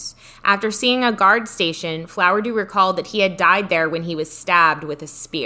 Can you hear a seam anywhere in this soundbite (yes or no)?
no